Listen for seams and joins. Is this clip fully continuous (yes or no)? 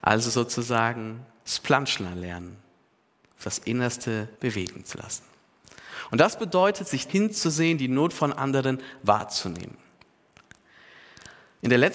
no